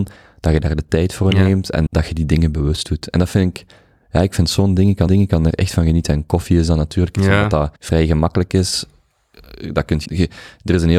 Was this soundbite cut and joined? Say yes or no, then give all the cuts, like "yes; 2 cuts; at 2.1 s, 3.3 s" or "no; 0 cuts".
yes; 4 cuts; at 1.9 s, 5.1 s, 7.8 s, 10.1 s